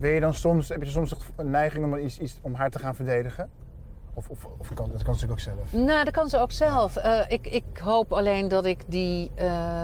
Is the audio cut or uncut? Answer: uncut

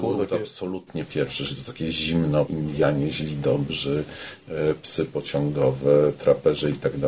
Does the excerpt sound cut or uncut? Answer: cut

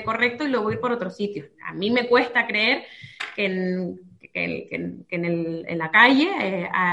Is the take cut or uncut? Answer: uncut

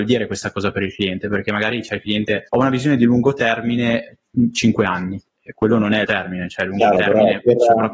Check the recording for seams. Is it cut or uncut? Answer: cut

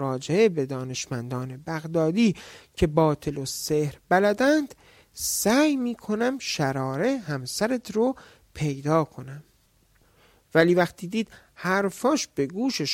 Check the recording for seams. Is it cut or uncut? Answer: uncut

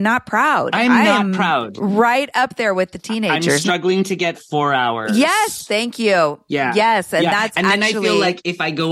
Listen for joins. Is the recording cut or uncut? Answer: cut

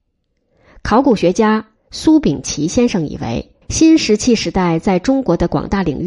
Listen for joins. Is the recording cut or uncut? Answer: cut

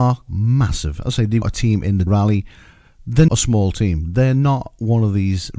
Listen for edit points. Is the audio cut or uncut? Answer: cut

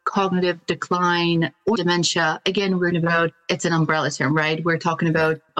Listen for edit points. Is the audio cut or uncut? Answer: cut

